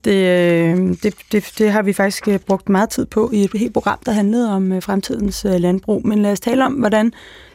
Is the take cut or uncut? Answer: uncut